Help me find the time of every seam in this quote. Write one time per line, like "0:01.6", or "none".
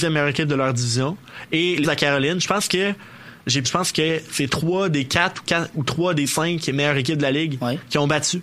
0:01.8
0:03.6